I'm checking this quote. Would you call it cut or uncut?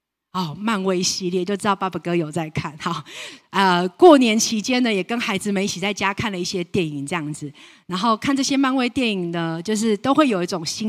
uncut